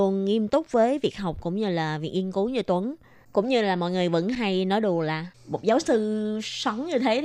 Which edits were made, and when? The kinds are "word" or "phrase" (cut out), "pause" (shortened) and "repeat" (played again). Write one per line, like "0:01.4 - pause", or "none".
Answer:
none

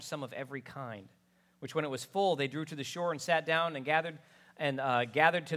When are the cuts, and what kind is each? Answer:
none

